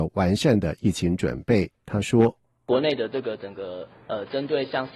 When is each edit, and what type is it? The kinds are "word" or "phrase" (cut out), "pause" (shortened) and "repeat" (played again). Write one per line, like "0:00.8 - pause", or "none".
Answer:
none